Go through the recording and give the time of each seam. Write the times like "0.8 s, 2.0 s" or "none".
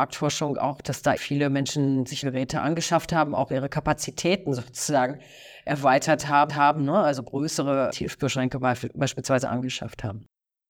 1.2 s, 2.2 s, 6.5 s, 7.9 s